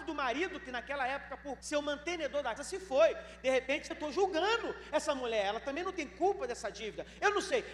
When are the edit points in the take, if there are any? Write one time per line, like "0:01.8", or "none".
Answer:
0:01.6
0:02.6
0:03.9